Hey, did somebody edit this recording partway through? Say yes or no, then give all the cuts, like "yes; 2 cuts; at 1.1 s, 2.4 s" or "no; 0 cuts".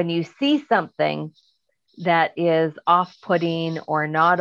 no; 0 cuts